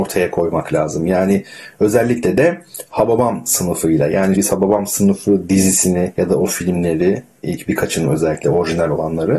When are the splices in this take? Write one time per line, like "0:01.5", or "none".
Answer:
0:04.4

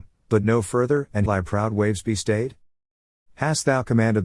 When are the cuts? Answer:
0:01.3

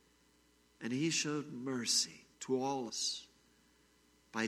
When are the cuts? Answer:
0:02.3
0:02.9

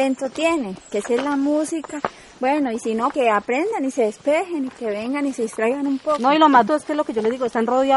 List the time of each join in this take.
0:03.1
0:06.7

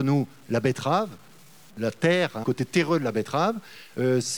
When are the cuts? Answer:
0:02.4

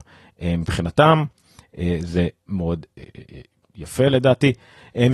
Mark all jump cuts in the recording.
none

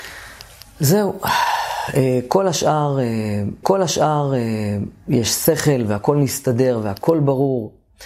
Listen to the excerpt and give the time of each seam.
0:03.6

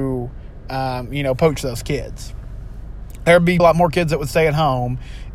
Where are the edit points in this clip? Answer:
0:03.6

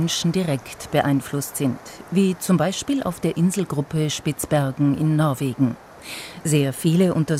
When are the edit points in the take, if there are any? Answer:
none

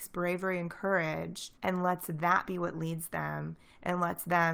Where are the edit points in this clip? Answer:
0:01.6

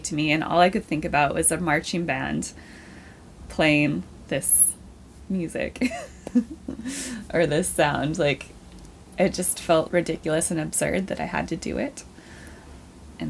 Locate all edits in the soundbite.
0:09.9

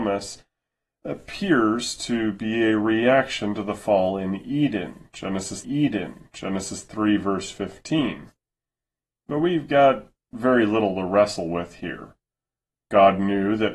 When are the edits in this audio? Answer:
0:05.6

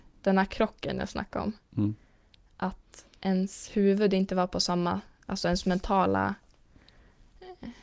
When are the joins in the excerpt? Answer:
none

